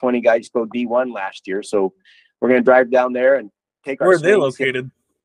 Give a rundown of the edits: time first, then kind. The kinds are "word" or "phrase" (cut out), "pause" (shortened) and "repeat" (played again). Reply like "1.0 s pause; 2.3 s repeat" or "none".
none

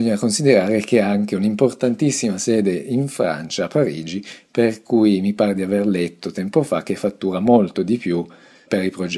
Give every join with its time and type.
none

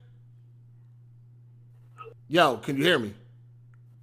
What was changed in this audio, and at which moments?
2.2 s pause

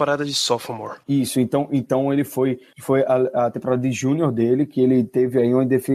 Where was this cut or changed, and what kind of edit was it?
none

